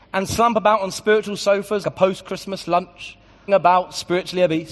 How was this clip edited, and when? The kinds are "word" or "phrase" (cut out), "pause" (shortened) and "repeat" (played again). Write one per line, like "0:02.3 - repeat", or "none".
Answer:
0:01.8 - word
0:03.5 - word